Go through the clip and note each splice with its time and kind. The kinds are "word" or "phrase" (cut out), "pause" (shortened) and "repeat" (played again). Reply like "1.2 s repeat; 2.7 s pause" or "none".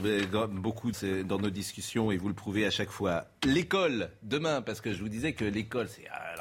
0.9 s word